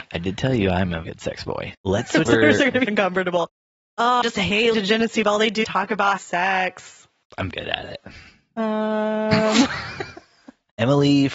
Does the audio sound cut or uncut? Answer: cut